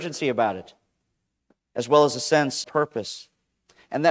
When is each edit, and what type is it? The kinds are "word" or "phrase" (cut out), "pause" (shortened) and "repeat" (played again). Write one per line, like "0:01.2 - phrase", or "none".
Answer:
0:02.6 - word